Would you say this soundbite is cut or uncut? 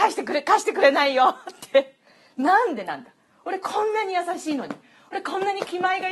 uncut